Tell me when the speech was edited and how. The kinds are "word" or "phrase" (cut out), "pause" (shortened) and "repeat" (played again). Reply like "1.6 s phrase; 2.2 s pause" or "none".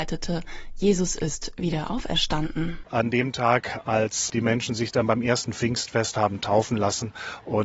none